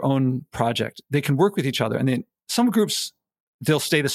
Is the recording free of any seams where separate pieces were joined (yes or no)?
yes